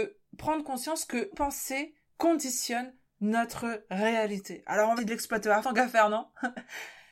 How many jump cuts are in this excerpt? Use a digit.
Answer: 3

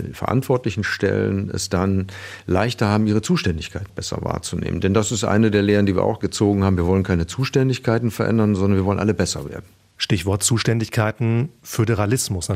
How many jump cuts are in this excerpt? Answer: 1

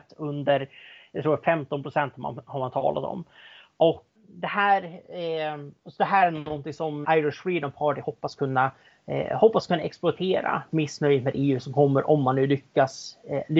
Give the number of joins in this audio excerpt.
3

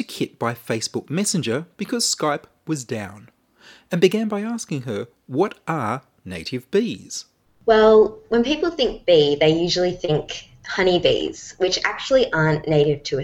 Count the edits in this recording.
0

